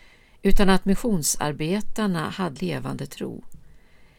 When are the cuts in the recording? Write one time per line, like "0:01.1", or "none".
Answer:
0:02.6